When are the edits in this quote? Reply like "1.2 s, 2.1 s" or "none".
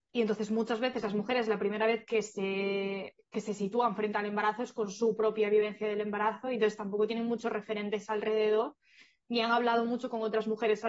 none

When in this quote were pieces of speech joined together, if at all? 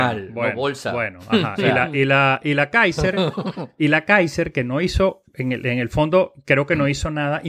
none

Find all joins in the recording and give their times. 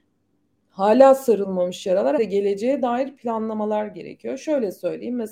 2.2 s

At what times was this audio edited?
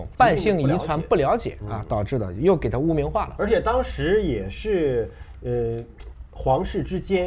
none

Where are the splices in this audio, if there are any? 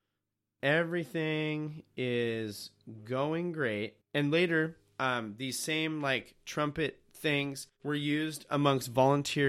4.0 s, 7.7 s

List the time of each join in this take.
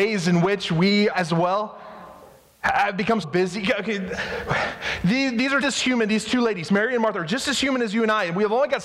1.1 s, 3.2 s, 5.6 s

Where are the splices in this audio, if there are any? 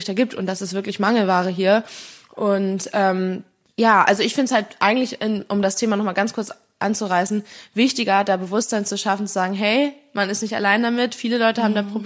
none

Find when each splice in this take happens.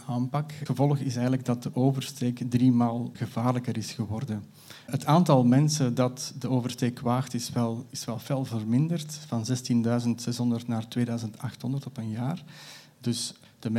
none

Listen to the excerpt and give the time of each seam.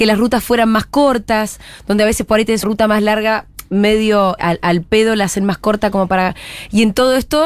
2.6 s, 4.4 s

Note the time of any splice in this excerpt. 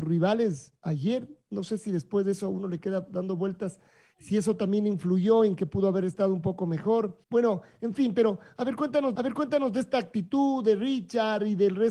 7.2 s, 9.2 s

